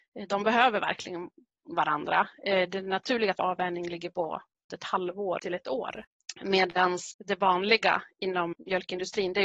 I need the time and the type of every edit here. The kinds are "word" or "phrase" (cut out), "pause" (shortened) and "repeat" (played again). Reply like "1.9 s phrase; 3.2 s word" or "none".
3.3 s word; 4.7 s word; 5.4 s word; 7.1 s word; 8.5 s word